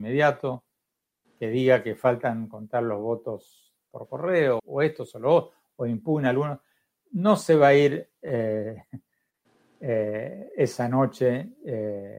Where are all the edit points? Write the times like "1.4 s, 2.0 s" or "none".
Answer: 4.6 s